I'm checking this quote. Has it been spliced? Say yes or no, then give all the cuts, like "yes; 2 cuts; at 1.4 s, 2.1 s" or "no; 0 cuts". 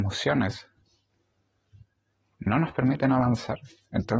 no; 0 cuts